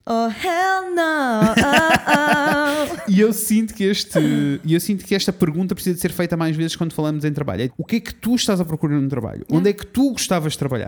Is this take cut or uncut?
cut